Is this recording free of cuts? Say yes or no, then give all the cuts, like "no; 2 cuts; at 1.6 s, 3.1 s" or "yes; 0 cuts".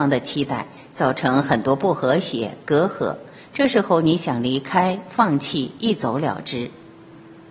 yes; 0 cuts